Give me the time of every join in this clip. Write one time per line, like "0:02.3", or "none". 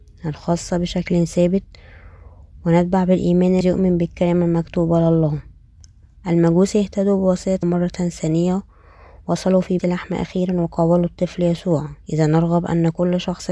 0:03.6
0:07.6
0:09.8
0:12.0